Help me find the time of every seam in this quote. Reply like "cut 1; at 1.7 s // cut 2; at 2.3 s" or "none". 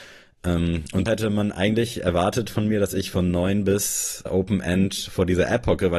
cut 1; at 1.1 s // cut 2; at 4.3 s